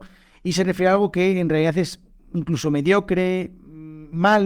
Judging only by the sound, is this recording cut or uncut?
uncut